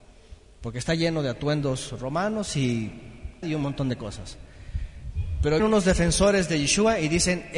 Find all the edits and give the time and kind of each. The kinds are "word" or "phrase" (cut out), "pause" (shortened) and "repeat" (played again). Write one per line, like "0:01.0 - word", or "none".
0:03.4 - word
0:05.6 - word